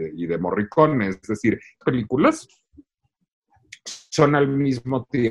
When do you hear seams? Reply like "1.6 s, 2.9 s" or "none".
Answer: 1.8 s